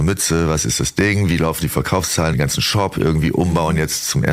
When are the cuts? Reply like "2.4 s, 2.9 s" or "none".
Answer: 2.3 s